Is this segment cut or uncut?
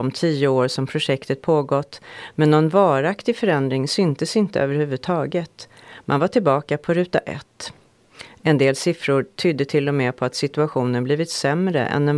uncut